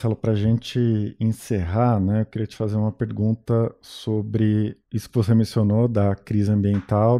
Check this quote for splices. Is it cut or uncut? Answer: uncut